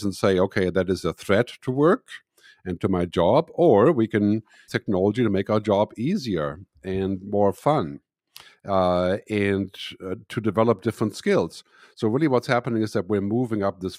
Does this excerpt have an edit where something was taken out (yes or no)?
yes